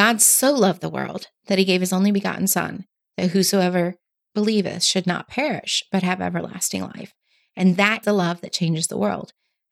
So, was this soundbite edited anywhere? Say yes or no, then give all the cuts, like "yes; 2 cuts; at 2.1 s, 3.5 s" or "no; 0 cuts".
yes; 1 cut; at 8.0 s